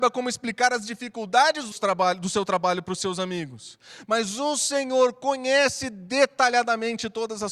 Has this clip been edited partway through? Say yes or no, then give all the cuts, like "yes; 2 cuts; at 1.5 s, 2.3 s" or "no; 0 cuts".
yes; 1 cut; at 1.7 s